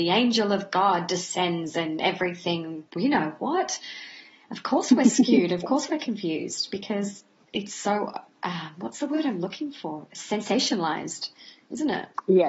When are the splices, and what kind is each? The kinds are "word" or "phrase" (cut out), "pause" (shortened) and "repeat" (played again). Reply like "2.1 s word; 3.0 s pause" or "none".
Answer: 2.9 s word